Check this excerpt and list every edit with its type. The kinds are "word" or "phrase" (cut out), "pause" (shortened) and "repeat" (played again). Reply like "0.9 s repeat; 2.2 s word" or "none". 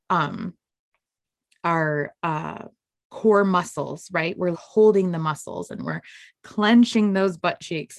4.5 s word